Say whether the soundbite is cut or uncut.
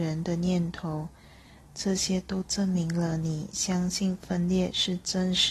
uncut